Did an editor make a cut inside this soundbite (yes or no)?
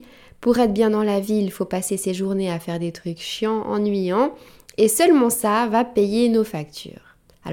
no